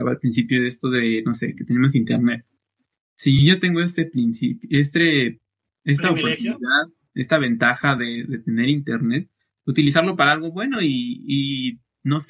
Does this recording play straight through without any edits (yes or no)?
yes